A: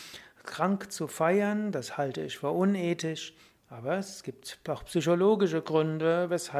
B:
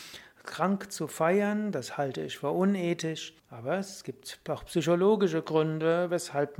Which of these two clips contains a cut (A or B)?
B